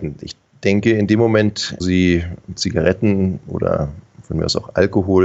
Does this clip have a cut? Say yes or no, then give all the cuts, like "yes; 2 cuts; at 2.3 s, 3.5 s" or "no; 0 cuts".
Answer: yes; 2 cuts; at 1.8 s, 2.4 s